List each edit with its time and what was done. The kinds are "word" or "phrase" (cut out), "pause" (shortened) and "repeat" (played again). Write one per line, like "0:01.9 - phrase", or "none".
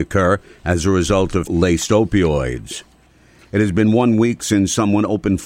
0:01.5 - word